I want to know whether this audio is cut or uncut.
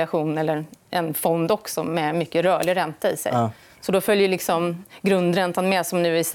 uncut